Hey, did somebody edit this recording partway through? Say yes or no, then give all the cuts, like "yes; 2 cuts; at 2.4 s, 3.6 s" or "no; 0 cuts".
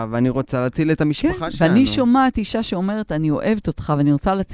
no; 0 cuts